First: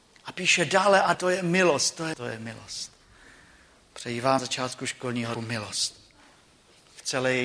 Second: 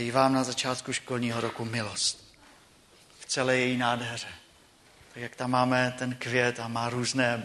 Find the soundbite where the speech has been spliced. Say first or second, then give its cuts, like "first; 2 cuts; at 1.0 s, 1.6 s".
first; 4 cuts; at 1.1 s, 2.1 s, 4.4 s, 5.3 s